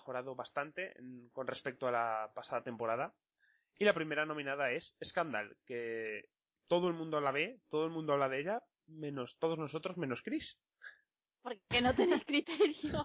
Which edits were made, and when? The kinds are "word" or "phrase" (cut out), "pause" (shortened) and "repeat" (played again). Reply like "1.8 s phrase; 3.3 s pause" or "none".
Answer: none